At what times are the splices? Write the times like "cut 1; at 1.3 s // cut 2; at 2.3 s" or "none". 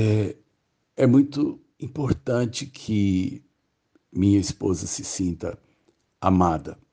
none